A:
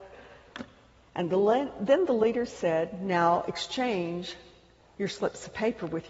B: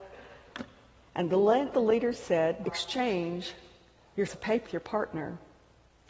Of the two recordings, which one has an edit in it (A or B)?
B